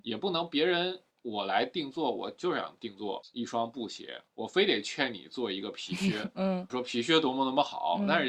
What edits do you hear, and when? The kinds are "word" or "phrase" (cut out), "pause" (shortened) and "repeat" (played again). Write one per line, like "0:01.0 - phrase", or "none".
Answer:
0:01.1 - pause
0:04.3 - pause
0:06.7 - word